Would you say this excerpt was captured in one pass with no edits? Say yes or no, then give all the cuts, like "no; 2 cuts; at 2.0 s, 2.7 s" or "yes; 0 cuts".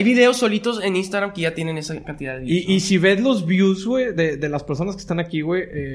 yes; 0 cuts